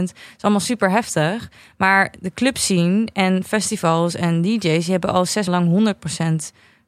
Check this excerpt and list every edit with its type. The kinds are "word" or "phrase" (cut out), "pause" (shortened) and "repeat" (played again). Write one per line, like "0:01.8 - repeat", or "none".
0:05.5 - word